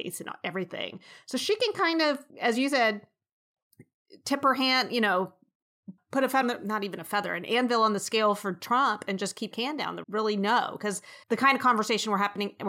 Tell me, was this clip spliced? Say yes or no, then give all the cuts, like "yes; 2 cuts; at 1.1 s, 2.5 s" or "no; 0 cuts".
yes; 6 cuts; at 2.3 s, 6.0 s, 6.4 s, 9.5 s, 10.0 s, 11.2 s